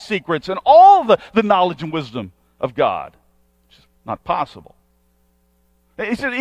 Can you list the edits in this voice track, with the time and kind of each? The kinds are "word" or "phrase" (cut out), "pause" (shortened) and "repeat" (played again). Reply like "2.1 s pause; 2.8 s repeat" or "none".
none

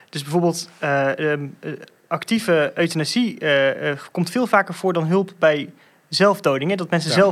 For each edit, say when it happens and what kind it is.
none

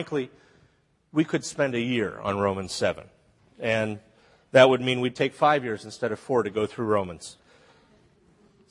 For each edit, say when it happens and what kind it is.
none

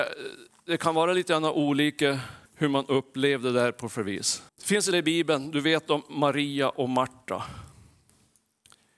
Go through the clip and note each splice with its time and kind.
2.5 s pause; 4.5 s pause; 4.9 s word

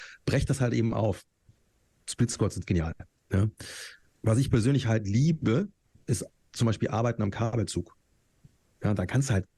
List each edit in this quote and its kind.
none

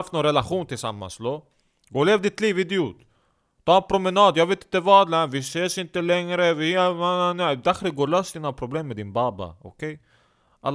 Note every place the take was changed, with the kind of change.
none

